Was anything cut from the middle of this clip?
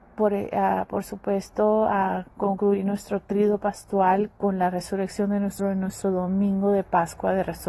yes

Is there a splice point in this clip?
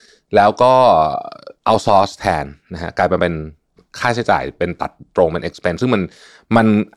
no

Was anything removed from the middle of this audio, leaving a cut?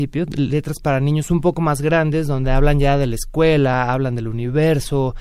no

